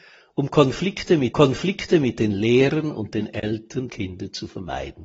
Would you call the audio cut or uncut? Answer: cut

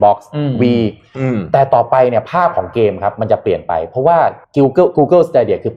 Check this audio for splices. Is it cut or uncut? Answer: cut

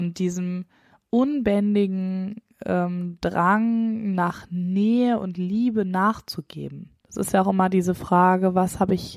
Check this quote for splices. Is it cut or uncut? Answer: cut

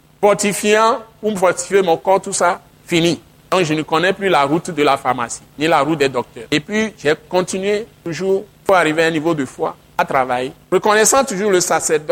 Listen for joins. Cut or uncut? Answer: uncut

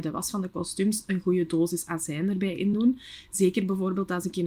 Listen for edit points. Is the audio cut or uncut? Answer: uncut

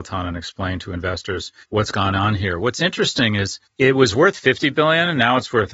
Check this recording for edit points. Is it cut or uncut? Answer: cut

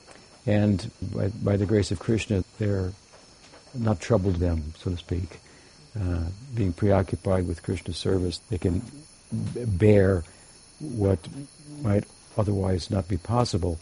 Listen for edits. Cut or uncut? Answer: cut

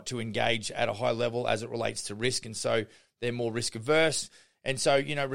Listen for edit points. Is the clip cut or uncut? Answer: uncut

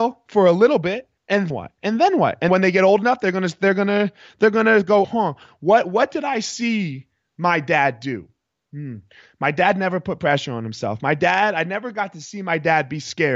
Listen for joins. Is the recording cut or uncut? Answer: cut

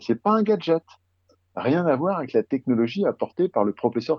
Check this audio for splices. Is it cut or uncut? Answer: uncut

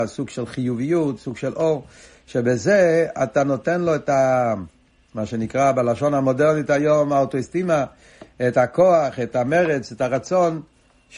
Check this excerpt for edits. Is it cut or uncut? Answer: uncut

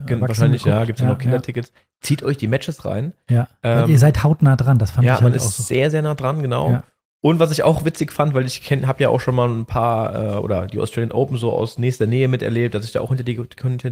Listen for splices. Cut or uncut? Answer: uncut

